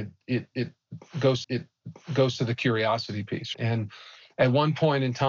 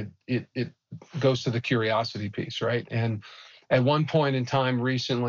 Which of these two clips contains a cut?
first; 2 cuts; at 1.4 s, 3.5 s

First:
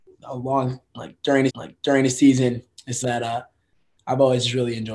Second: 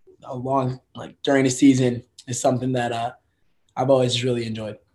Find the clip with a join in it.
first; 2 cuts; at 1.5 s, 3.0 s

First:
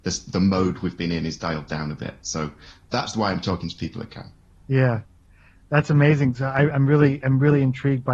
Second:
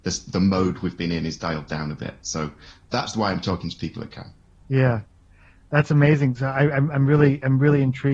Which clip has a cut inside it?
first; 1 cut; at 6.7 s

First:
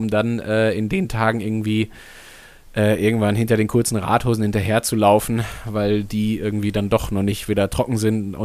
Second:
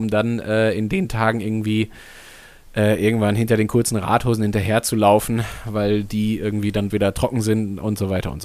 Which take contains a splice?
second; 1 cut; at 6.9 s

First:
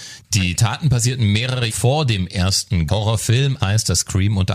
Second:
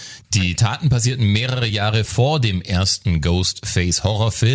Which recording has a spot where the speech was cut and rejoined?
first; 3 cuts; at 1.7 s, 2.9 s, 3.6 s

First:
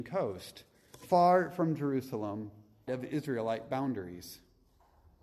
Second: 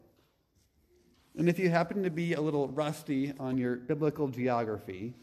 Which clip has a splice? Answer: first; 1 cut; at 2.9 s

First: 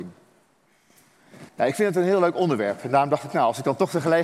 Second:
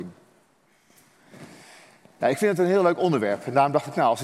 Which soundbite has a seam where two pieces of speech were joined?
first; 1 cut; at 1.5 s

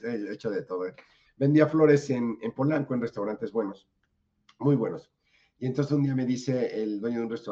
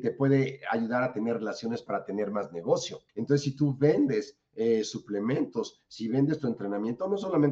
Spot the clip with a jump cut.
second; 1 cut; at 3.1 s

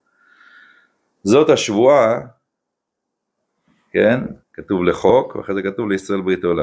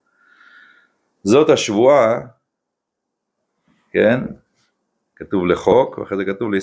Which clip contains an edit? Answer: first; 1 cut; at 4.4 s

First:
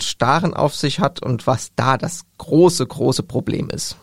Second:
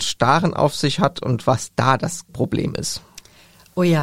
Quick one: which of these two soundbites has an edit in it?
second; 1 cut; at 2.3 s

